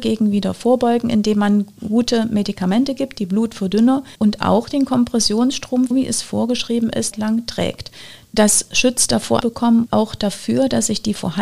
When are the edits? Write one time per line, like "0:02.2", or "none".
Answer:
0:04.1
0:05.9
0:07.1
0:09.4
0:09.9